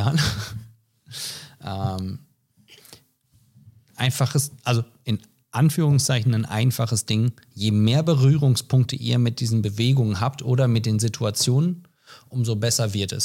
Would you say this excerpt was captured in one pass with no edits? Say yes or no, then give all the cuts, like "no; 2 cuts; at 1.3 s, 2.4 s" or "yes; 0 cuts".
yes; 0 cuts